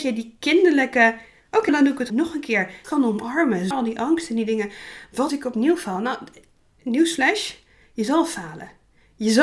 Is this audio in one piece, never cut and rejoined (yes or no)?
no